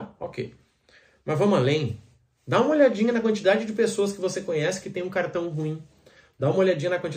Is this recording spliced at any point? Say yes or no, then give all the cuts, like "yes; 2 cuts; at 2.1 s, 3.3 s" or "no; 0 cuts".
no; 0 cuts